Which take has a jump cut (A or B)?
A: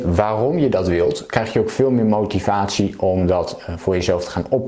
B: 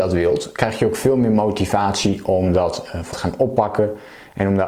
B